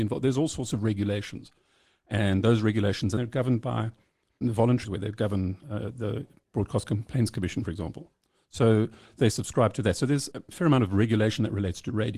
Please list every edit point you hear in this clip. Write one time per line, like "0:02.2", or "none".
0:03.2
0:04.4
0:04.8
0:10.3